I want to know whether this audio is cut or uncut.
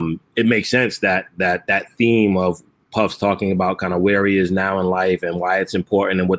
uncut